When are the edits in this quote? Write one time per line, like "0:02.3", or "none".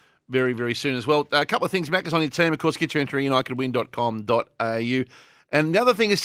none